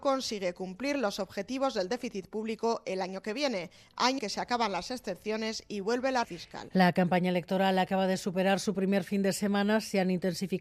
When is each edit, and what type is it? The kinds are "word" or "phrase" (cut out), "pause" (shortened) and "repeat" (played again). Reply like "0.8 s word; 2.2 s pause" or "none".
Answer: 4.2 s word; 6.2 s word